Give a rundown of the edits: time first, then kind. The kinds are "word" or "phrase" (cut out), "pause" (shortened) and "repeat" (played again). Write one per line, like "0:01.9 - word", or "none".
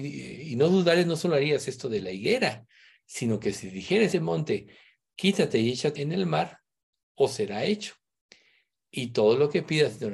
0:04.1 - word
0:06.0 - word

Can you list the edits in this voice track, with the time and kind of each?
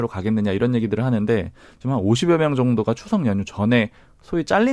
none

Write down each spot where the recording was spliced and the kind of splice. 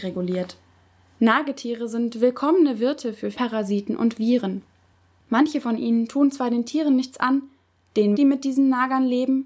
0:03.3 - word
0:08.1 - word

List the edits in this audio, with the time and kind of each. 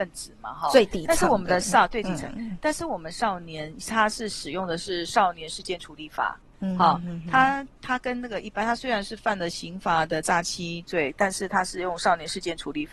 none

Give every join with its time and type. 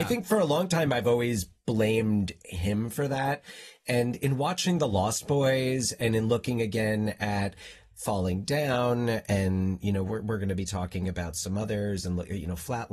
none

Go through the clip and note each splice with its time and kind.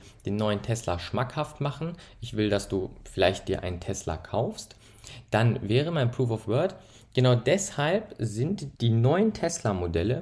0:08.7 - pause

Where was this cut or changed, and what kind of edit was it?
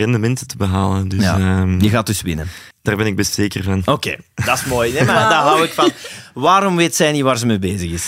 0:02.7 - pause

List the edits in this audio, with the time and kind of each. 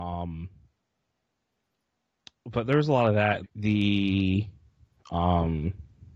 0:03.4 - word

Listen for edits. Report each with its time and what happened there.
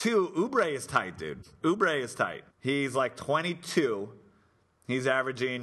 0:02.5 - pause

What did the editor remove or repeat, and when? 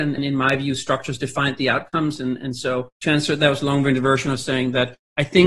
0:02.9 - pause

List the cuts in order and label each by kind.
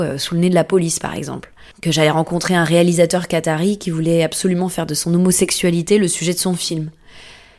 0:01.7 - pause

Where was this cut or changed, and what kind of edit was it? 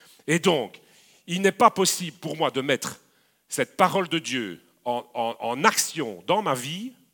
none

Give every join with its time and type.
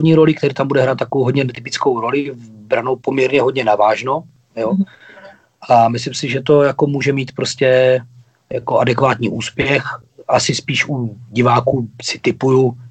none

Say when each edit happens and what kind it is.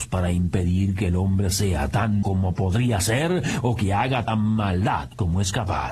0:02.2 - word
0:04.3 - word

